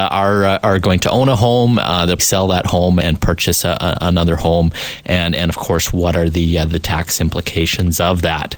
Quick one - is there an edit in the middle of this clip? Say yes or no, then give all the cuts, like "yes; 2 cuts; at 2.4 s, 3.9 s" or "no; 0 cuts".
yes; 2 cuts; at 2.2 s, 3.0 s